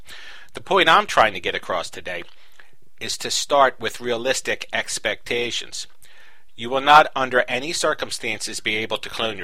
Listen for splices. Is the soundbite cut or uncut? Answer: uncut